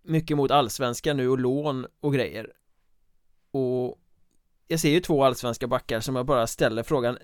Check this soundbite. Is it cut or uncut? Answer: uncut